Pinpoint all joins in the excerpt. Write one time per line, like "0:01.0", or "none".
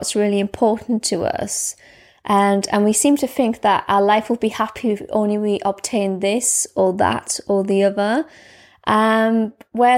none